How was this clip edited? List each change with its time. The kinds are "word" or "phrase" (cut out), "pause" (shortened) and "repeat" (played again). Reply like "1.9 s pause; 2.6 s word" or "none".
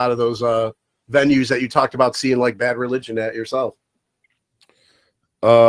none